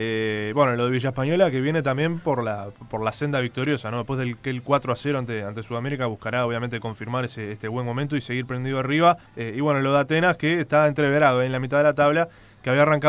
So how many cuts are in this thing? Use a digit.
1